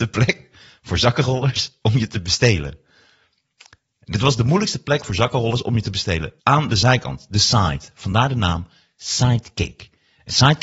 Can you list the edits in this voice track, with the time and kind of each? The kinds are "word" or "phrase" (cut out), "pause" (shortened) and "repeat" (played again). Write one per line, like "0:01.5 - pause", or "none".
0:06.4 - pause

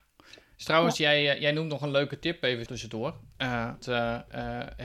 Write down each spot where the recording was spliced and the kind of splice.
0:02.7 - word
0:03.8 - word

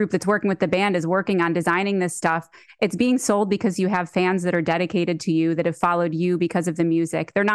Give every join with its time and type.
none

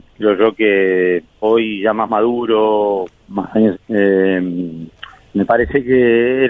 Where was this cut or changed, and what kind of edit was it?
0:01.4 - word
0:03.1 - word
0:03.7 - word

